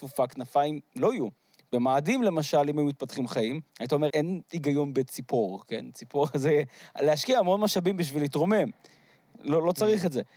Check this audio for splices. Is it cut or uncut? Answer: cut